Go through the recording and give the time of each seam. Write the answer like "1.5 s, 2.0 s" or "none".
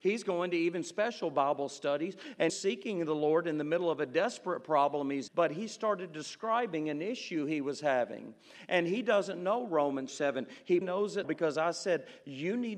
2.5 s, 5.3 s, 10.1 s, 10.8 s, 11.2 s